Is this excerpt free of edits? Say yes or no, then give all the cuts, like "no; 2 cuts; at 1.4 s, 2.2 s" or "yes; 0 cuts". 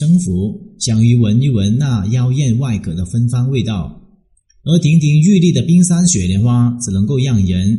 yes; 0 cuts